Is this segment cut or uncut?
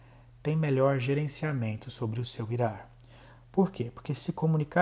uncut